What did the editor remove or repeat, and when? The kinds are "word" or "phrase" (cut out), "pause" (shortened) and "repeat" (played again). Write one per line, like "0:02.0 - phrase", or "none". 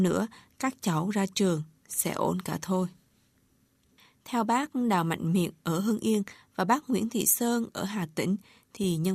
none